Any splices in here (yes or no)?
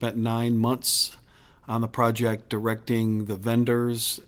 no